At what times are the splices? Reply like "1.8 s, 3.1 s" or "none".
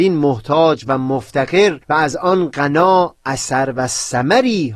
1.8 s